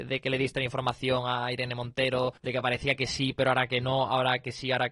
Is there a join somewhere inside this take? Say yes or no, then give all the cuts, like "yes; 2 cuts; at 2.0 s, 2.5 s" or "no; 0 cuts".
yes; 1 cut; at 2.4 s